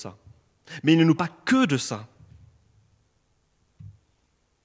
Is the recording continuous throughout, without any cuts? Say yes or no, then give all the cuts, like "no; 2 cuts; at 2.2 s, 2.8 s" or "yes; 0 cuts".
no; 1 cut; at 1.2 s